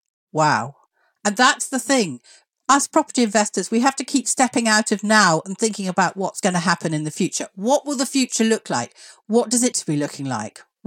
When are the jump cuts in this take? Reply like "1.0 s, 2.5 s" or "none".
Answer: 9.7 s